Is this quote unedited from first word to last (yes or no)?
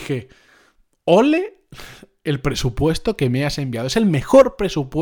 yes